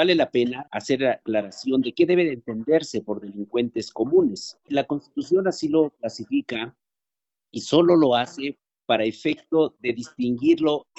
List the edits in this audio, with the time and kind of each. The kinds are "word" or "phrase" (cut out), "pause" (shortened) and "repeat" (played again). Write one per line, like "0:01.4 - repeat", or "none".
none